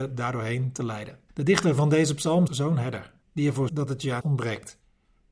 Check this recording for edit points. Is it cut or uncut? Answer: cut